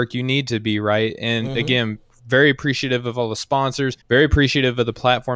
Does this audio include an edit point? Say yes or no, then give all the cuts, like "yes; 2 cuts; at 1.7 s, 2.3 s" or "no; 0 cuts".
yes; 1 cut; at 4.0 s